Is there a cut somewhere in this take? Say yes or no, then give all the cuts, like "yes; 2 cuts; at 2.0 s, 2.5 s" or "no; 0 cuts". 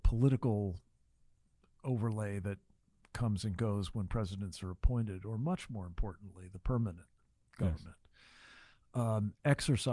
no; 0 cuts